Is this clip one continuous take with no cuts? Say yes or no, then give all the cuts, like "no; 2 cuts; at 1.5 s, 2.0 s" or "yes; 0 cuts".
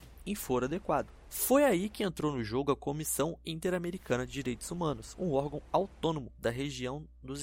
yes; 0 cuts